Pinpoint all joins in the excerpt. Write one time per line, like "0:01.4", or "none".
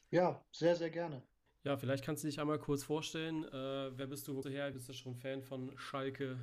0:01.5
0:04.4
0:04.7